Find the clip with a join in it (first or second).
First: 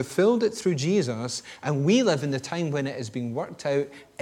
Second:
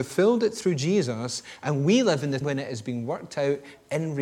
second